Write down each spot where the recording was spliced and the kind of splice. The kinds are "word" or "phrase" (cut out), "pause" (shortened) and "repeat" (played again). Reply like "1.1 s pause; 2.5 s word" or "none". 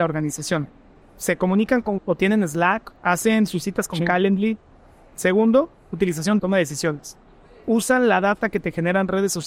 2.0 s word; 3.0 s phrase; 6.4 s phrase